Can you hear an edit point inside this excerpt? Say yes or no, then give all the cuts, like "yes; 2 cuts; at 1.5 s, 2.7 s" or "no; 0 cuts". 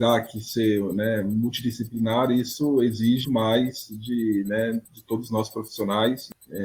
yes; 2 cuts; at 3.2 s, 4.9 s